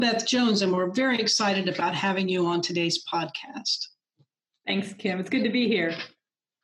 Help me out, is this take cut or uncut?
uncut